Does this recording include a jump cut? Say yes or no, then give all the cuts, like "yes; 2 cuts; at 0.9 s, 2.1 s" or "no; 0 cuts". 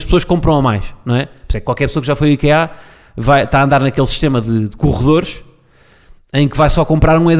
no; 0 cuts